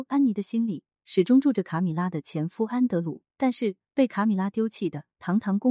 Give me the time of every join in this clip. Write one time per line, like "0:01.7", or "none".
0:03.3